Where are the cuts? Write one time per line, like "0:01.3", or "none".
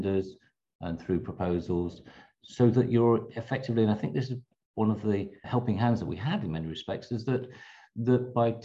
0:05.4